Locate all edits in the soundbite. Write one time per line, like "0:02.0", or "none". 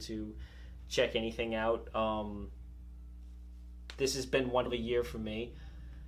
0:04.7